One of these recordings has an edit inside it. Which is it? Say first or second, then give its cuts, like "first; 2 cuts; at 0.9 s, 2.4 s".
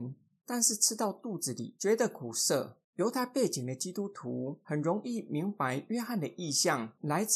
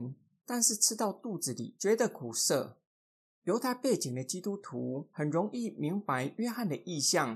first; 1 cut; at 2.8 s